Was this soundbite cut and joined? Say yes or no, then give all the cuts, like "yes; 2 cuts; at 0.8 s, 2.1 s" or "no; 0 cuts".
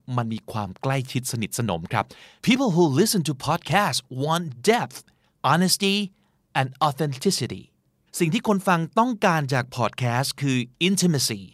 no; 0 cuts